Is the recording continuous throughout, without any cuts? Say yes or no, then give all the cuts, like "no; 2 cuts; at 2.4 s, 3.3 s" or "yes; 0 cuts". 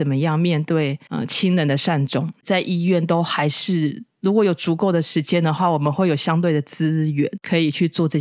no; 1 cut; at 2.4 s